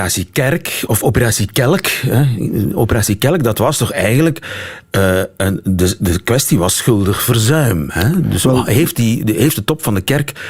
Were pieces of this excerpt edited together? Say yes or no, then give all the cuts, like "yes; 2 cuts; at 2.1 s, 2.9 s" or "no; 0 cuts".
no; 0 cuts